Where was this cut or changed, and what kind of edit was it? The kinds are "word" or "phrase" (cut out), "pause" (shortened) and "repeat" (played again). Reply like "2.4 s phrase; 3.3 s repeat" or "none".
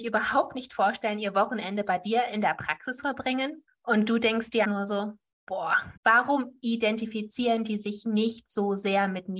3.0 s word; 3.7 s pause; 4.6 s word; 6.0 s pause